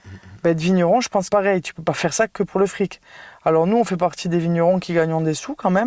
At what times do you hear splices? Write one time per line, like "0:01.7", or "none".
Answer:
0:01.3